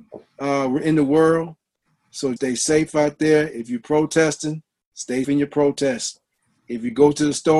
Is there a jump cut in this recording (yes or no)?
yes